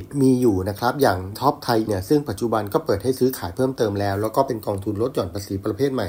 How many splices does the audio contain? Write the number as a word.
two